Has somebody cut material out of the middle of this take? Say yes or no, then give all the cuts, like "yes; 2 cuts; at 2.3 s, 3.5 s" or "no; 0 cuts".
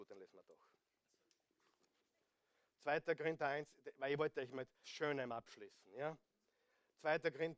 yes; 1 cut; at 4.8 s